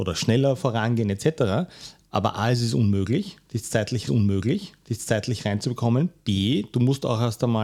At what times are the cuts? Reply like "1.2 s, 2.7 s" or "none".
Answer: 4.1 s